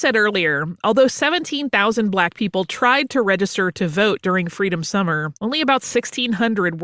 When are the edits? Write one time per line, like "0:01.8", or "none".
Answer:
0:05.4